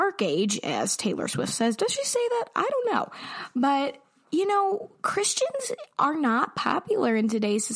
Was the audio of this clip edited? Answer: no; 0 cuts

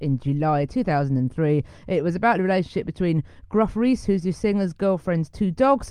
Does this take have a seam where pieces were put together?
no; 0 cuts

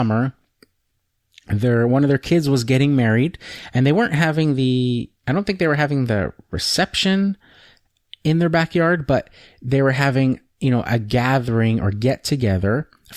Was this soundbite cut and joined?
no; 0 cuts

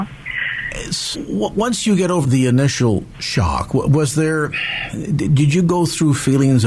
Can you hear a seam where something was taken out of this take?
yes; 2 cuts; at 1.1 s, 2.2 s

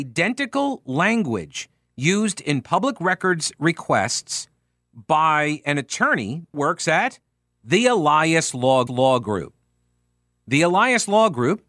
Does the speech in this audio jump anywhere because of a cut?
yes; 2 cuts; at 6.5 s, 8.9 s

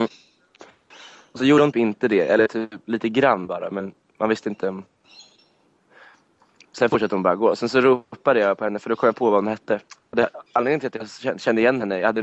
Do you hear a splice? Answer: yes; 1 cut; at 1.7 s

